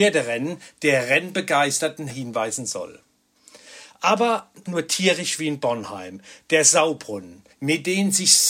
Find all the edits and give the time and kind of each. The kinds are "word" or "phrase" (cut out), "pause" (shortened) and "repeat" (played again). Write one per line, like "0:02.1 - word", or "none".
0:02.1 - word
0:04.7 - word
0:07.5 - pause